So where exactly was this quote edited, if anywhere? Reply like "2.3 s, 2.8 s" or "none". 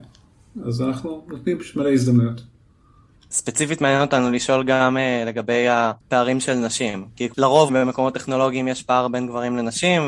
7.7 s

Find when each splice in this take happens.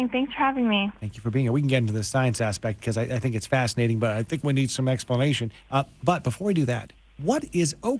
none

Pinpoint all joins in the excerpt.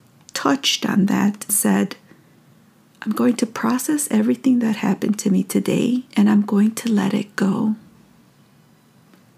1.5 s, 6.1 s

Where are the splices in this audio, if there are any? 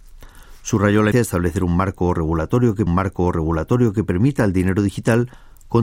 1.1 s, 2.9 s

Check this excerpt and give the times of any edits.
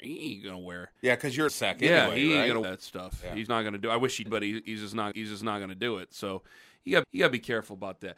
1.0 s, 1.5 s, 2.6 s, 3.5 s, 4.3 s, 5.1 s, 7.0 s

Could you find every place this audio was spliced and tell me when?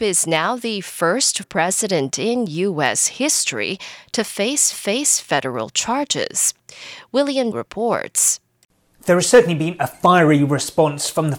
1.4 s, 4.7 s, 7.5 s

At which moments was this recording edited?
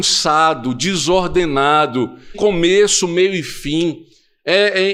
2.3 s

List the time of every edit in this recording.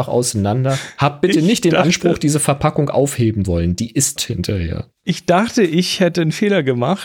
3.4 s, 4.2 s, 4.9 s

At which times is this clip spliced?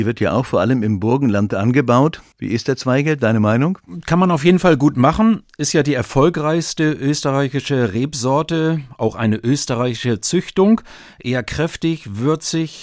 2.3 s

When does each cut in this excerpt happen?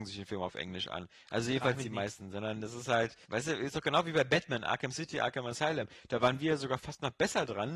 3.2 s

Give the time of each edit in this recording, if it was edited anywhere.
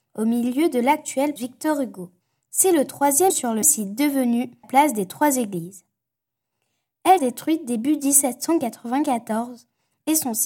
1.4 s, 2.2 s, 3.3 s, 3.6 s, 4.6 s, 7.2 s

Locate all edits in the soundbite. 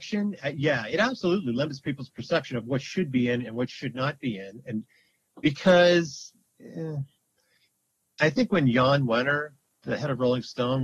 none

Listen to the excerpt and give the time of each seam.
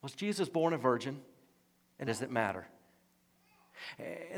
2.1 s

